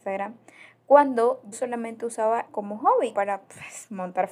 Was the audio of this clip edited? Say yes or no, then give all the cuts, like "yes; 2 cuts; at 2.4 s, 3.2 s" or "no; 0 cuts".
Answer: yes; 3 cuts; at 1.5 s, 2.5 s, 3.1 s